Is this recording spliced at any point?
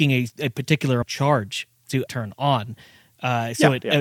yes; 2 cuts; at 1.0 s, 2.1 s

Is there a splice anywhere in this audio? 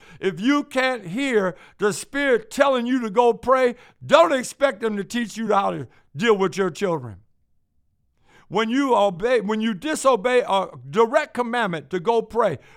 no; 0 cuts

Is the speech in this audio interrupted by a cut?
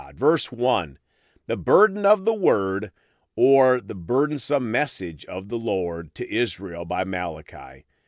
no; 0 cuts

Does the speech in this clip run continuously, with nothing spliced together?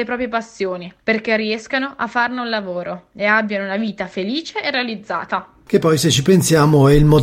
no; 1 cut; at 1.0 s

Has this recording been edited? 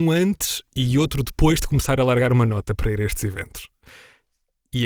no; 0 cuts

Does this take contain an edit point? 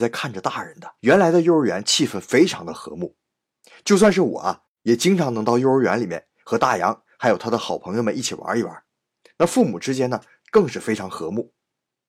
yes; 1 cut; at 1.0 s

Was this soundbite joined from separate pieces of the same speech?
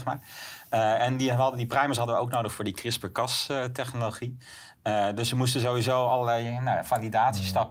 no; 0 cuts

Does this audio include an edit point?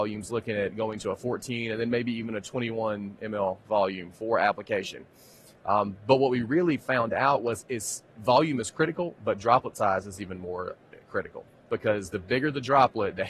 no; 0 cuts

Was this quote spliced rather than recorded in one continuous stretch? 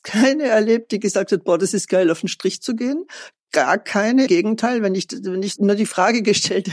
yes; 2 cuts; at 4.3 s, 5.6 s

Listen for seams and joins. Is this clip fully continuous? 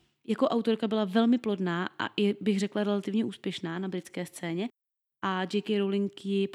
yes; 0 cuts

